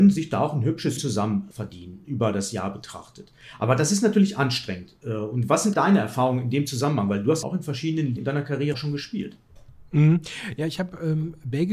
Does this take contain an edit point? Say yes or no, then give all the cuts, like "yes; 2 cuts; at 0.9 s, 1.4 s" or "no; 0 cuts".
yes; 6 cuts; at 1.0 s, 1.5 s, 5.7 s, 7.4 s, 8.2 s, 8.7 s